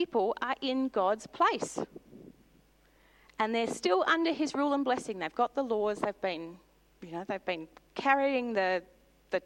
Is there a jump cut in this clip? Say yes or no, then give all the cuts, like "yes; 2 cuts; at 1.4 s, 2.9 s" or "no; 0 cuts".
no; 0 cuts